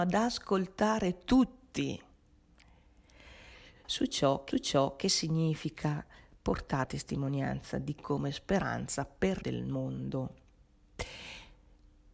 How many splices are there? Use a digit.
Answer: 4